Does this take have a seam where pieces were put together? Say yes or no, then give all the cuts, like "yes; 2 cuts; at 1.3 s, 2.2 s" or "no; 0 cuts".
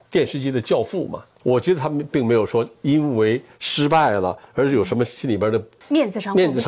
no; 0 cuts